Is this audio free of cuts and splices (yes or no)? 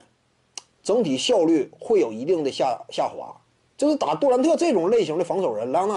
yes